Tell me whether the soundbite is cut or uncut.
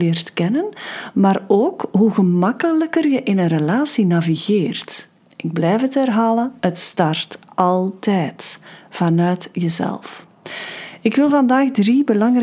uncut